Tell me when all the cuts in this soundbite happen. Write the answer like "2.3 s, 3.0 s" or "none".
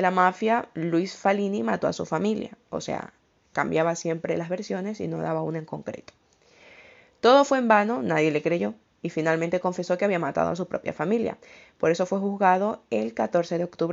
none